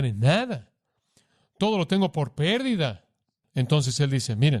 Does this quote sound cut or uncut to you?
uncut